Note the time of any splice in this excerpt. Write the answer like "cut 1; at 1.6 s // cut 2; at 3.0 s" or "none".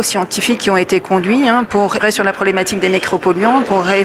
cut 1; at 2.0 s